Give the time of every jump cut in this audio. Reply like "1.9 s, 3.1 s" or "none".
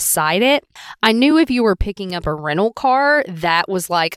none